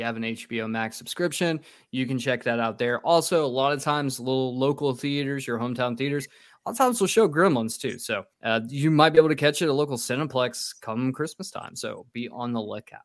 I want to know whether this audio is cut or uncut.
cut